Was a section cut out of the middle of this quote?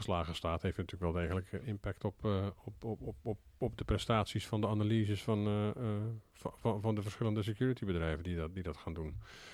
no; 0 cuts

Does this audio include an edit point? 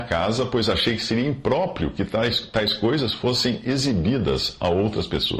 no; 0 cuts

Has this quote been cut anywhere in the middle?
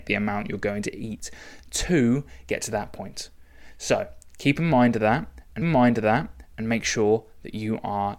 yes; 1 cut; at 5.6 s

